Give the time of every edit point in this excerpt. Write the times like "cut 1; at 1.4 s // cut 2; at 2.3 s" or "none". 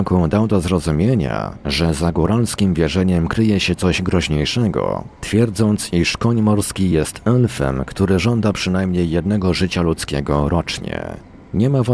none

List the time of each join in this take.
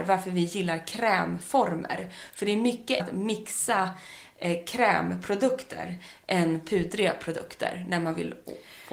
cut 1; at 3.0 s

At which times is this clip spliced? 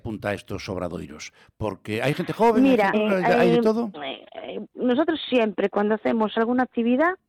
cut 1; at 2.9 s

